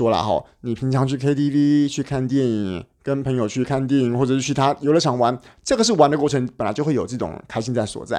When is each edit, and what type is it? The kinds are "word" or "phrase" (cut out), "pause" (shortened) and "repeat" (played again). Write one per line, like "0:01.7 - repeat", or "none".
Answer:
none